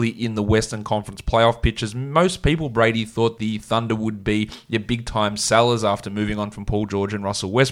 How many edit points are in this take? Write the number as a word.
one